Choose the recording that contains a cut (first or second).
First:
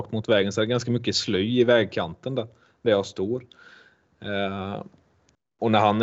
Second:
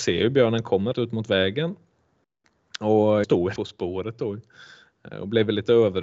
second